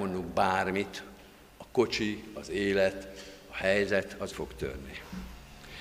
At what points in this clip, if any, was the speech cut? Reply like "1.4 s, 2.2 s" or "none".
4.3 s